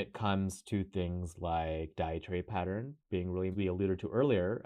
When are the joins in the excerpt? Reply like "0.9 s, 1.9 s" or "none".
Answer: 3.5 s